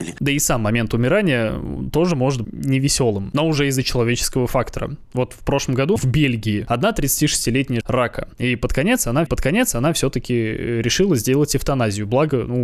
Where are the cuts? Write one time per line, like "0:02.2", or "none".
0:02.4
0:06.0
0:07.8
0:08.3
0:09.3